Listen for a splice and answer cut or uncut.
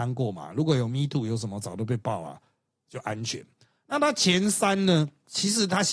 uncut